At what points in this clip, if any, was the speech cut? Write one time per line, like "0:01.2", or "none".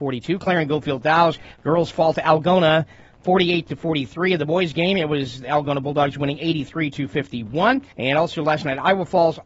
0:01.5
0:07.9